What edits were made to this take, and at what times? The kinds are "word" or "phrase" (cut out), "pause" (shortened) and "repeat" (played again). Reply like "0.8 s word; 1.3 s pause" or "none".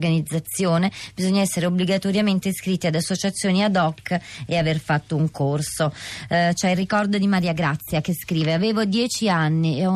none